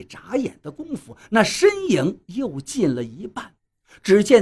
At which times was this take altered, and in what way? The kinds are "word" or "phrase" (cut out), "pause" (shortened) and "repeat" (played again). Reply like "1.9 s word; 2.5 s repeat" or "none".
none